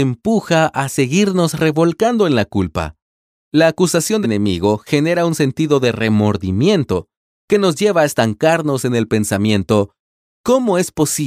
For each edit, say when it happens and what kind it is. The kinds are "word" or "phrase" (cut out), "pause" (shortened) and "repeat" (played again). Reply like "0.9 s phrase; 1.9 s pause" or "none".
4.2 s word